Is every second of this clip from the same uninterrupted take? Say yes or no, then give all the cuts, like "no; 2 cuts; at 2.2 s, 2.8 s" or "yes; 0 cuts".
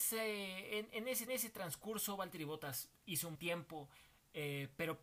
no; 2 cuts; at 1.3 s, 3.3 s